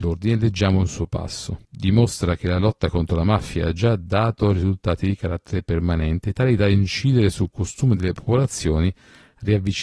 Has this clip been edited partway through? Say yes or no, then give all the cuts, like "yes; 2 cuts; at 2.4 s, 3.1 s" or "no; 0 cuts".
yes; 1 cut; at 1.6 s